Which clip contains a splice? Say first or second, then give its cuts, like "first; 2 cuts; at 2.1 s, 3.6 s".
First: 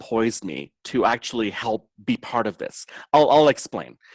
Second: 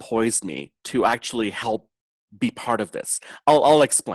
first; 1 cut; at 1.9 s